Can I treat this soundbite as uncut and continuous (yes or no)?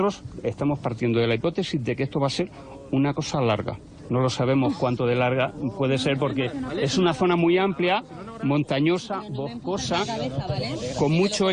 yes